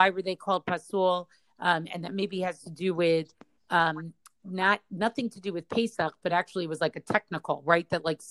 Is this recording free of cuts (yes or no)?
yes